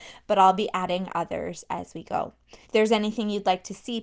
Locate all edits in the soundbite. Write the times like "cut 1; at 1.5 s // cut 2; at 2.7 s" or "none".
cut 1; at 2.6 s